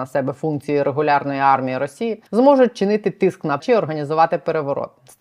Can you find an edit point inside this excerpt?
yes; 2 cuts; at 2.3 s, 3.6 s

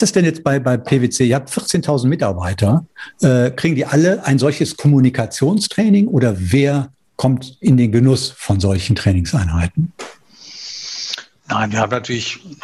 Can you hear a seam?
no; 0 cuts

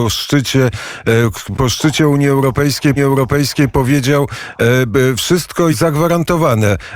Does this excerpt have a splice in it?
yes; 3 cuts; at 1.5 s, 3.0 s, 5.7 s

